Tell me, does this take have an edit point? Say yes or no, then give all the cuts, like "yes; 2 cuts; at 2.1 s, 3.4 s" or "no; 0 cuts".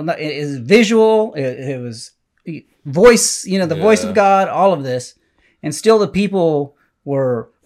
no; 0 cuts